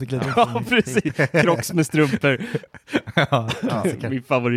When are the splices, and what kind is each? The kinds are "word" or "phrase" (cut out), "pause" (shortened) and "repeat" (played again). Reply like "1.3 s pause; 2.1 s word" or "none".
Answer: none